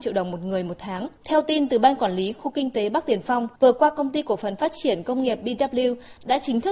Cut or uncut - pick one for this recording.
cut